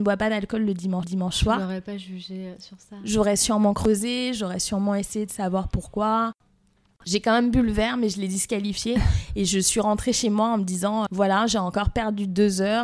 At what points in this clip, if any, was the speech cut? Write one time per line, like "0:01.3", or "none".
0:01.0
0:11.1